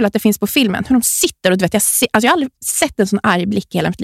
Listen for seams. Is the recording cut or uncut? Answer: uncut